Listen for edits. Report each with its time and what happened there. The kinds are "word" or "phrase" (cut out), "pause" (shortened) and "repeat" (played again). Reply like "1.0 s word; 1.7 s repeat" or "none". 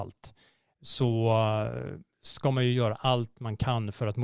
none

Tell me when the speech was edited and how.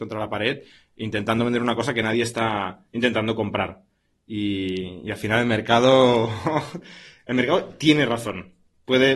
none

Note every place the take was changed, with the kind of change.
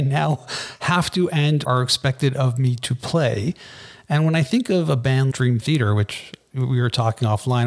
1.6 s word; 5.3 s word

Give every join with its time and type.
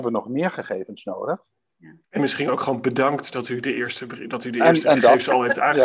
2.0 s pause

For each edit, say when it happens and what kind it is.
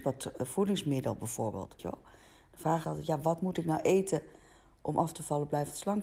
1.8 s word; 2.8 s word

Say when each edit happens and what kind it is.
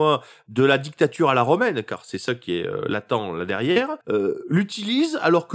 4.0 s pause

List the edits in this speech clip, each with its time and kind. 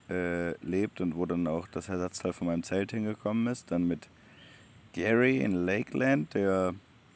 none

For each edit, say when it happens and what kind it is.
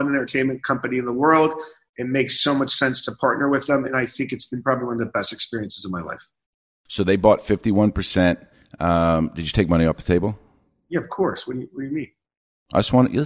none

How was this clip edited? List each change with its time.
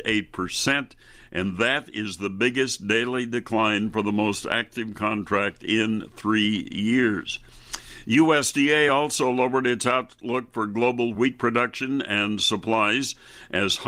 none

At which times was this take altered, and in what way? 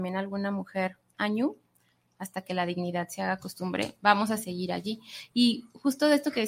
none

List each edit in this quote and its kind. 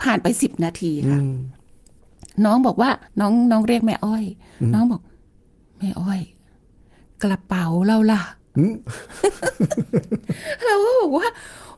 3.1 s pause

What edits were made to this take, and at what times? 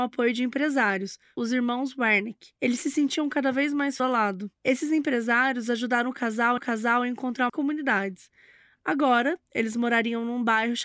2.6 s pause; 4.0 s phrase; 4.6 s pause; 6.6 s repeat; 7.5 s phrase

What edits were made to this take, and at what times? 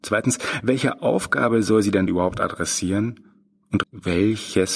2.1 s word; 3.8 s word

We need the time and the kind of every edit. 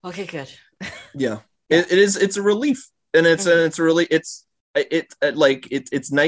none

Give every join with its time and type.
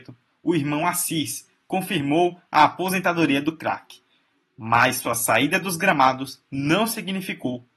none

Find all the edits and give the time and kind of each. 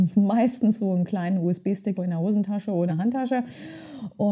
1.9 s word; 2.9 s word

